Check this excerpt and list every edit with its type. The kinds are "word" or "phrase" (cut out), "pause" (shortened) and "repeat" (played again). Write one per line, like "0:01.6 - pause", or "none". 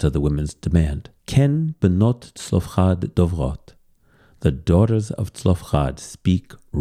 0:01.2 - pause